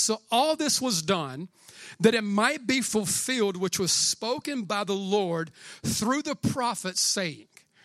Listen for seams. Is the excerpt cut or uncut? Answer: uncut